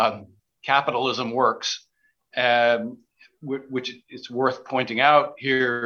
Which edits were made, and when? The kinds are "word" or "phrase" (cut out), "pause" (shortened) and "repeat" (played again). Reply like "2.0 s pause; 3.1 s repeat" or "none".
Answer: none